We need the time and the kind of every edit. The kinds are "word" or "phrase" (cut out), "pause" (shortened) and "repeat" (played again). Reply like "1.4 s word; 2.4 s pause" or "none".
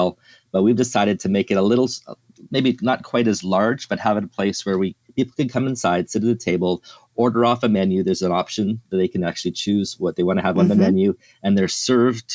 none